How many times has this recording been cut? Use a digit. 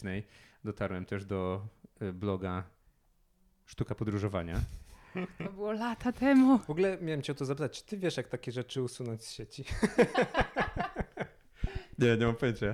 0